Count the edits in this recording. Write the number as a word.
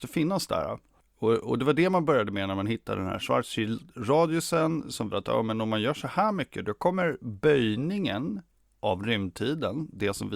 one